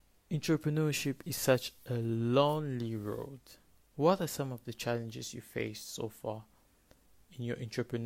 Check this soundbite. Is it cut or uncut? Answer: uncut